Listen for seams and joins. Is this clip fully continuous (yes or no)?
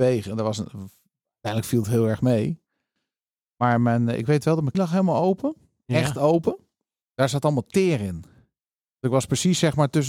no